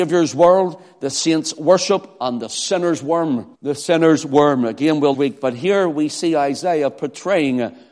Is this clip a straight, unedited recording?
no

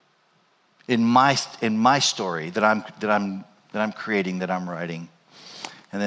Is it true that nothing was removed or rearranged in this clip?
yes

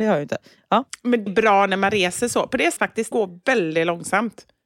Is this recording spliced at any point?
yes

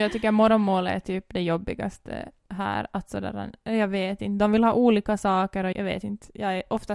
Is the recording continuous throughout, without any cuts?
no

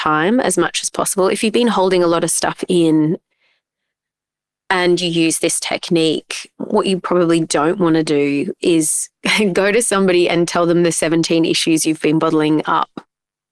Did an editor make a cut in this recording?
no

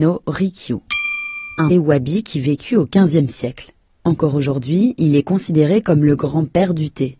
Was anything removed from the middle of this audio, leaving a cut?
yes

